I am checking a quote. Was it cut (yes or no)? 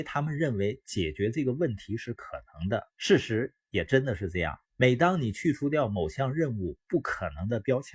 yes